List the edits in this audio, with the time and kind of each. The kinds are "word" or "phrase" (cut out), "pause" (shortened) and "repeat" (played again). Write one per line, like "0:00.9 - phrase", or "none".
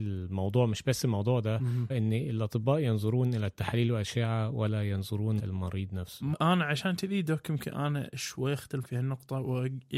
0:01.9 - word
0:05.4 - word
0:06.3 - word
0:08.8 - word

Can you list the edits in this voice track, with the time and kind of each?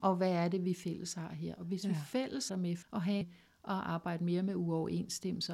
0:02.5 - word
0:02.8 - word
0:03.2 - phrase

